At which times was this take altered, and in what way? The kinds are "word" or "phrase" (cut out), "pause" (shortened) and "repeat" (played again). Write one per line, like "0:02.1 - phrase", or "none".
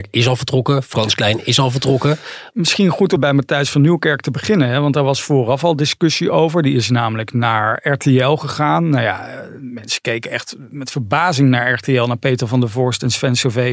0:03.2 - word